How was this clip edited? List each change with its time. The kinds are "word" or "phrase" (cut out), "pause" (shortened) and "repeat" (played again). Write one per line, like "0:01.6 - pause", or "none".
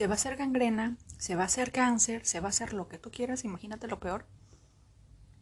none